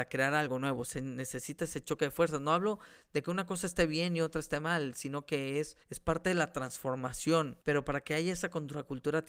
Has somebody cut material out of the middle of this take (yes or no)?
yes